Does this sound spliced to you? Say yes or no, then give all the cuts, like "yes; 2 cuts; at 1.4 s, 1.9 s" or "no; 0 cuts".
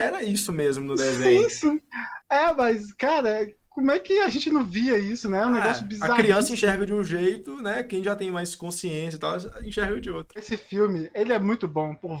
no; 0 cuts